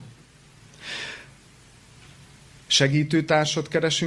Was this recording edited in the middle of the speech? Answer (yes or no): no